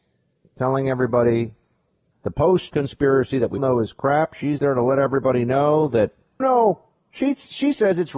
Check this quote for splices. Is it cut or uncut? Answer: cut